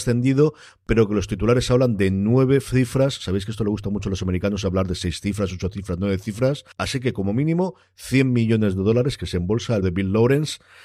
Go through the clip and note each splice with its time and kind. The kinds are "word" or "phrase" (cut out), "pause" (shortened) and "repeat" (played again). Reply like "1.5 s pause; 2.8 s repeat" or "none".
6.7 s pause; 9.8 s word